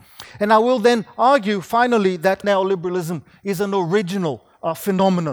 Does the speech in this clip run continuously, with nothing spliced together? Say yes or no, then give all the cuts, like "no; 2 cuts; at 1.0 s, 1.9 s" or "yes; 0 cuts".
no; 1 cut; at 2.4 s